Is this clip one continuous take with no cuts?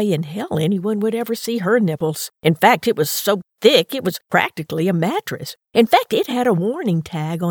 no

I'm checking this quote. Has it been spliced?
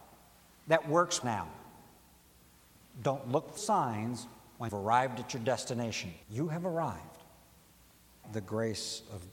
yes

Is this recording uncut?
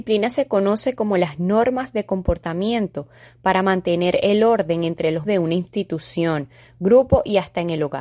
no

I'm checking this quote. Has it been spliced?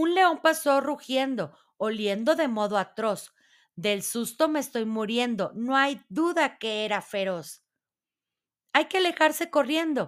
no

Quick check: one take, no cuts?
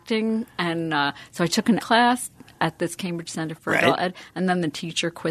no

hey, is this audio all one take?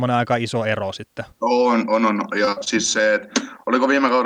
no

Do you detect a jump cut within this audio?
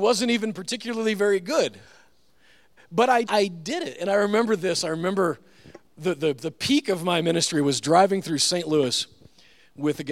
yes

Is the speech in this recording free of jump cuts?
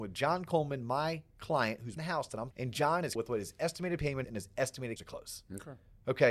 no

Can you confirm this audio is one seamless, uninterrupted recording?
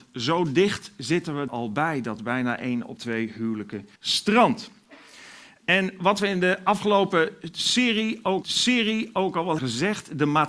no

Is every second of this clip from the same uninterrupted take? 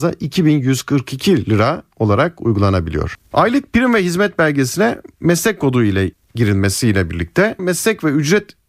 no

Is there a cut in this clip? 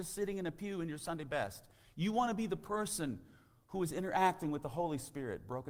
no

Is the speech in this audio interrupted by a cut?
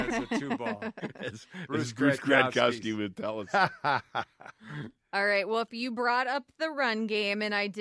no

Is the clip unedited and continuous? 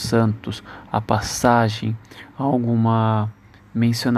yes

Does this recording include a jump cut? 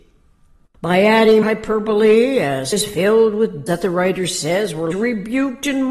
yes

